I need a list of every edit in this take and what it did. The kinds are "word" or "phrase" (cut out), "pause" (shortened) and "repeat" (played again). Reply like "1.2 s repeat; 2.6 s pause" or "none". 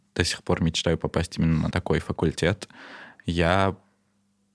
1.7 s word